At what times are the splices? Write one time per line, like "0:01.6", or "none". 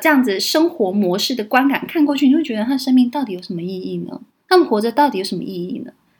0:04.3